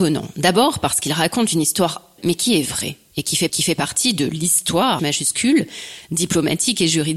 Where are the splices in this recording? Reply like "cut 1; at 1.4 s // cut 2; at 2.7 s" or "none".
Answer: cut 1; at 2.2 s // cut 2; at 3.5 s // cut 3; at 5.0 s